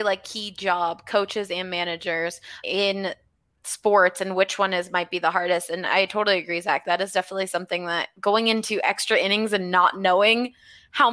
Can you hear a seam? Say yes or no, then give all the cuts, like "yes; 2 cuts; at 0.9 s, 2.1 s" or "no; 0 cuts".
yes; 1 cut; at 2.6 s